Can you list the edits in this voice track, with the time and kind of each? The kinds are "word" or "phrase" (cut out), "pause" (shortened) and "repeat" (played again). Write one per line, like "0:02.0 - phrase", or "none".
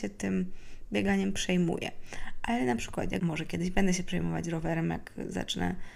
0:03.2 - phrase

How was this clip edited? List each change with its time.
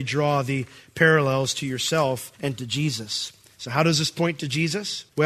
0:02.3 - pause

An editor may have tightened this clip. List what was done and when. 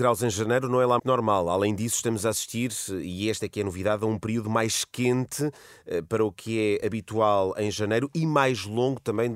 0:01.0 - word

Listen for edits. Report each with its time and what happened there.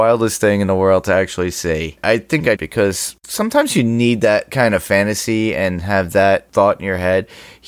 0:02.6 - phrase

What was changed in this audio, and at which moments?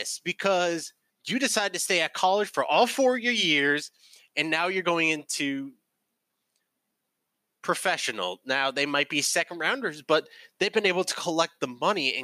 0:01.1 - pause

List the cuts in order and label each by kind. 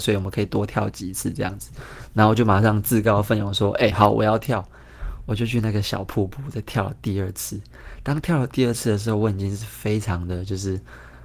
none

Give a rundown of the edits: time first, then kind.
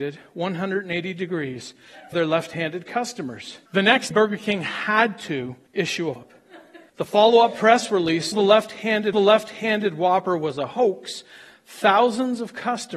0:02.1 - phrase
0:03.7 - pause
0:04.1 - word
0:05.7 - pause
0:06.2 - word
0:06.9 - pause
0:08.3 - phrase
0:09.1 - repeat

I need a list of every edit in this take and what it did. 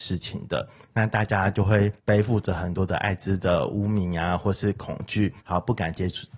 0:02.0 - pause
0:05.4 - pause

